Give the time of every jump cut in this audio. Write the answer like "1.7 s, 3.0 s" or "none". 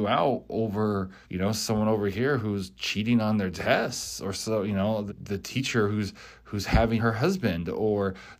1.2 s, 5.1 s, 7.0 s